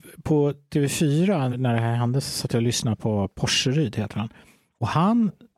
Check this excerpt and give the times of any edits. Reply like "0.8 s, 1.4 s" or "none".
1.5 s